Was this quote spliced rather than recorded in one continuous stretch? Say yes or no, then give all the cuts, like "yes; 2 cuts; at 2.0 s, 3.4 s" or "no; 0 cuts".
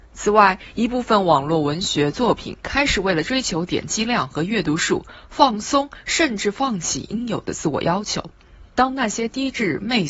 yes; 1 cut; at 8.7 s